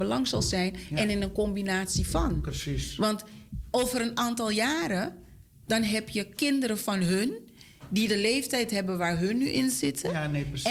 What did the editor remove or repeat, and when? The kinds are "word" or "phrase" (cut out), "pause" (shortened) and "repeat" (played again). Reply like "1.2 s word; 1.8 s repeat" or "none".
none